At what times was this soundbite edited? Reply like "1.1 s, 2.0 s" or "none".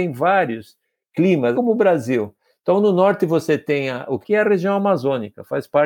1.5 s, 4.2 s

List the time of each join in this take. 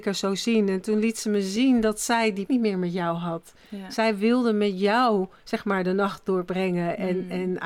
2.5 s

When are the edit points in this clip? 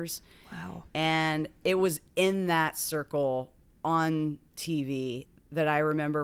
none

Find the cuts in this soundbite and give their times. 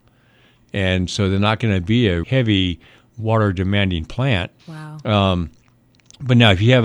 2.2 s, 4.6 s

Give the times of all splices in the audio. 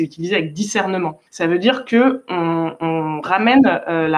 1.3 s

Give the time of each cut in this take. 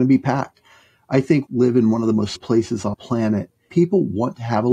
1.5 s, 2.4 s, 2.9 s, 3.7 s

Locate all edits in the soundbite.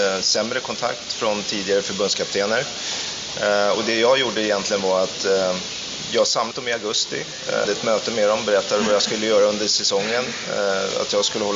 6.5 s, 7.6 s

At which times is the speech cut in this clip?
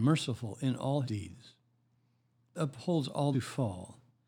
1.0 s, 2.6 s, 3.3 s

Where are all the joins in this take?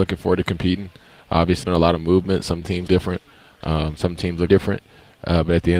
1.6 s, 2.9 s, 4.5 s

